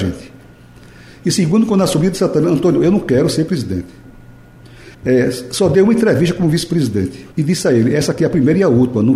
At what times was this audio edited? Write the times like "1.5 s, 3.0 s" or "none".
4.9 s, 7.3 s